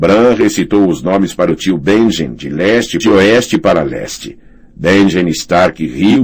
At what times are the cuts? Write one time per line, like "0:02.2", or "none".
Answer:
0:03.0